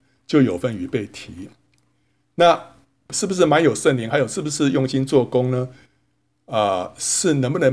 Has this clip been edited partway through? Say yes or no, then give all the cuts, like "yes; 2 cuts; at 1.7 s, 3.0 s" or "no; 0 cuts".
no; 0 cuts